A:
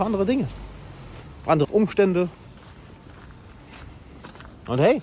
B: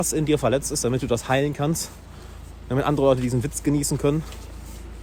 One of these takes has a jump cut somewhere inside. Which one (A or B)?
A